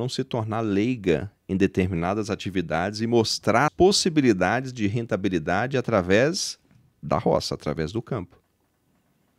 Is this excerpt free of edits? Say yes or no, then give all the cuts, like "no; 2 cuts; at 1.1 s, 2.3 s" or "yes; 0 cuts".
no; 1 cut; at 3.7 s